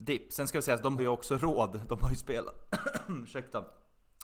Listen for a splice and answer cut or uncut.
cut